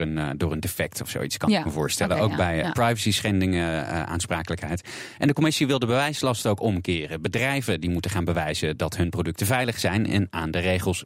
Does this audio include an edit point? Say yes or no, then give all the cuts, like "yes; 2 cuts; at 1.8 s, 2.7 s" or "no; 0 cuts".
no; 0 cuts